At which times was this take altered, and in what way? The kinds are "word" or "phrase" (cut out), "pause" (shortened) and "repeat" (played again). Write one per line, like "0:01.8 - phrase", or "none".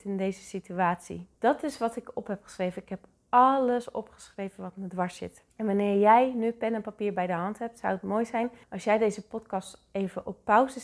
0:01.3 - pause
0:05.5 - pause
0:08.6 - pause